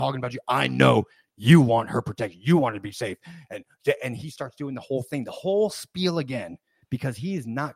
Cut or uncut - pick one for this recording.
uncut